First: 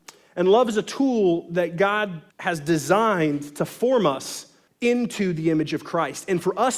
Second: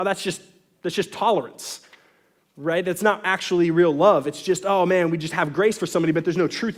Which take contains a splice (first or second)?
first